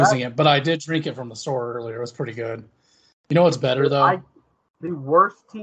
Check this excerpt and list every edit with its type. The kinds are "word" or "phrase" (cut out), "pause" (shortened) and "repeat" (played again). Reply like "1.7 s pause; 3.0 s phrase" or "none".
none